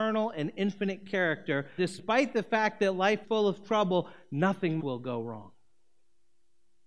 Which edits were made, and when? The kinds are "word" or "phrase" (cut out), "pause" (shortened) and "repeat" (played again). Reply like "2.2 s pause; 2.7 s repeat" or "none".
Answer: 1.8 s word; 3.2 s word; 4.8 s word